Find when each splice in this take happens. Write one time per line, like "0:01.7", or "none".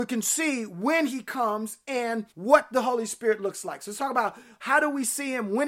0:02.3